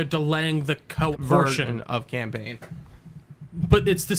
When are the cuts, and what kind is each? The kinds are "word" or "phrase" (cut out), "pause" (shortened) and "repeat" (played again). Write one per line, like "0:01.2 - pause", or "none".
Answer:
0:01.1 - word

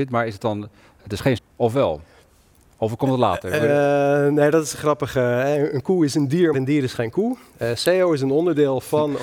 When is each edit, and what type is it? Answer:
0:01.4 - word
0:06.5 - word

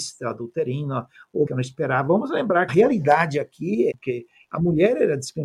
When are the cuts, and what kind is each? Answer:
0:01.5 - phrase
0:02.7 - phrase
0:03.9 - phrase

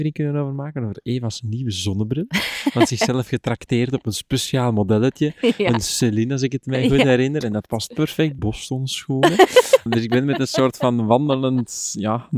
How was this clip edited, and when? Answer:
0:02.9 - word
0:08.4 - word
0:09.9 - word

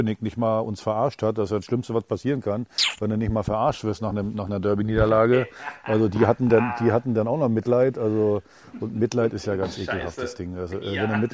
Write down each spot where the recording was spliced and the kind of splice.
none

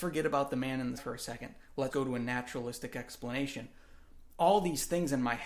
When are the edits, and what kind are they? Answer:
0:01.0 - word
0:01.9 - word

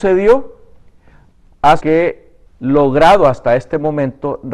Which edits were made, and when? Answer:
0:01.8 - word
0:02.4 - word

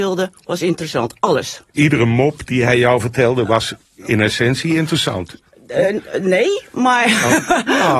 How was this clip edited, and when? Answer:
none

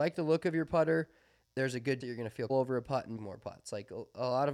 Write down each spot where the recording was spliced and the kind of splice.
0:02.0 - word
0:02.5 - word
0:03.2 - word

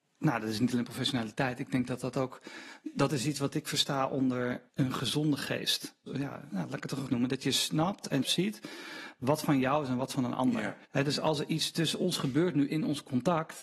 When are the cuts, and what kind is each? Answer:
0:04.7 - pause
0:06.1 - word
0:07.1 - phrase
0:08.2 - word
0:10.8 - pause

